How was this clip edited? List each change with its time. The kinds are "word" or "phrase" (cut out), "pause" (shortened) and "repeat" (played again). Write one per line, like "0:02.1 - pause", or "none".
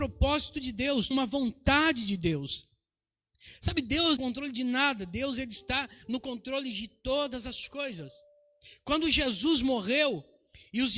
0:01.1 - phrase
0:04.2 - phrase